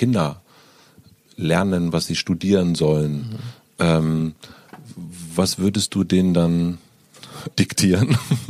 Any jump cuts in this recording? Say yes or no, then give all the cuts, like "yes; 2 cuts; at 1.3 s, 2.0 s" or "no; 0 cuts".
yes; 1 cut; at 7.5 s